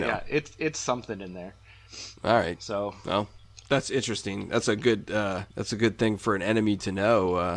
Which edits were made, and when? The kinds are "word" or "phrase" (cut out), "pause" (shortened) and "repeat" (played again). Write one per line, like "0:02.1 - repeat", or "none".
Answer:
0:02.2 - pause
0:05.5 - pause